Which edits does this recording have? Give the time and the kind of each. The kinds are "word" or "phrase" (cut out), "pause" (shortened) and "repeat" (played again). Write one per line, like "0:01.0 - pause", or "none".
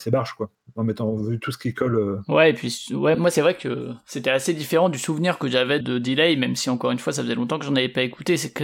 0:03.1 - word
0:05.8 - word